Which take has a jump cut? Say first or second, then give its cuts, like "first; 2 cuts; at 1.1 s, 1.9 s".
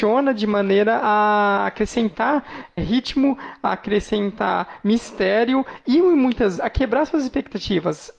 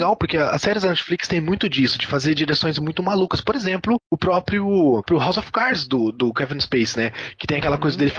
first; 2 cuts; at 2.8 s, 6.6 s